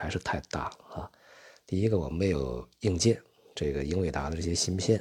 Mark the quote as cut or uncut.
uncut